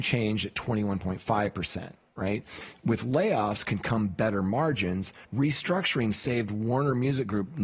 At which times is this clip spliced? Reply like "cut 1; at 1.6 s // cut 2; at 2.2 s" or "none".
cut 1; at 5.2 s